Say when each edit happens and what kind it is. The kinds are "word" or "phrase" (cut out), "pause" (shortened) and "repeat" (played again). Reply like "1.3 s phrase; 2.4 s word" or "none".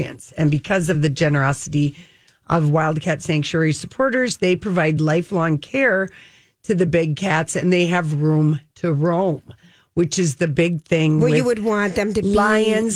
none